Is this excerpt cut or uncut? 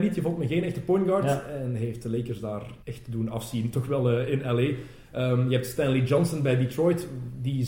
cut